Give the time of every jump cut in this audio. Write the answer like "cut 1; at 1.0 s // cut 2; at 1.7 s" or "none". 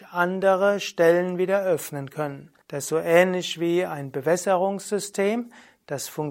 cut 1; at 2.6 s